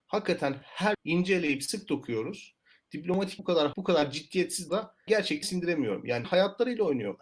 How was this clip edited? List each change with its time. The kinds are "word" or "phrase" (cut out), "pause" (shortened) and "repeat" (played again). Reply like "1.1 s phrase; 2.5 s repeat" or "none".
0.9 s word; 3.4 s word; 3.7 s word; 4.7 s word; 5.1 s word; 5.4 s word; 6.2 s word